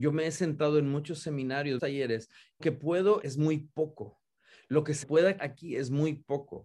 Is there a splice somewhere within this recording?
yes; 5 cuts; at 1.8 s, 2.6 s, 3.2 s, 5.0 s, 5.4 s

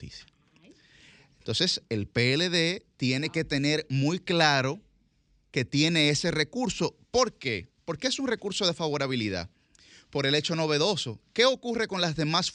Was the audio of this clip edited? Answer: no; 0 cuts

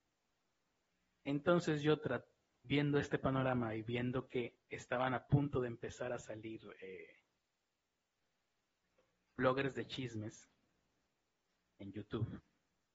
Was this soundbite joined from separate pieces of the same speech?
no; 0 cuts

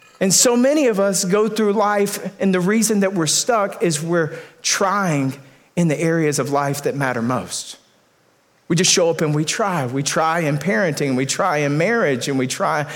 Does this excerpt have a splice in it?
no; 0 cuts

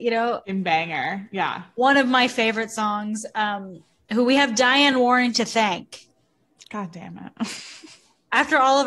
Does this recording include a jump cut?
no; 0 cuts

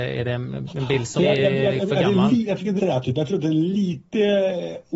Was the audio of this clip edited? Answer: yes; 2 cuts; at 1.2 s, 2.8 s

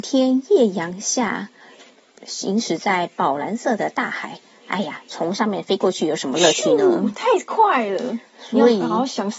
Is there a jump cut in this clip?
no; 0 cuts

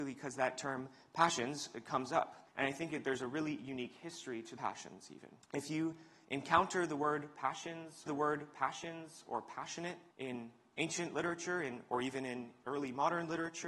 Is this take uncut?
no; 5 cuts; at 2.5 s, 4.6 s, 5.4 s, 8.1 s, 10.1 s

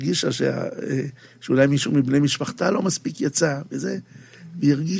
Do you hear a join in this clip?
no; 0 cuts

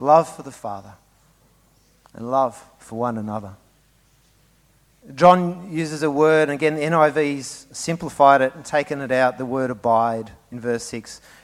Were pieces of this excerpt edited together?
no; 0 cuts

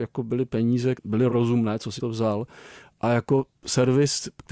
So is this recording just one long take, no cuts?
no; 3 cuts; at 0.9 s, 1.3 s, 2.0 s

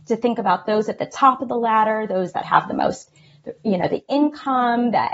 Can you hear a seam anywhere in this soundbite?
no; 0 cuts

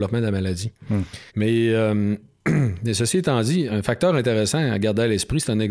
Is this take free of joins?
no; 2 cuts; at 1.3 s, 3.7 s

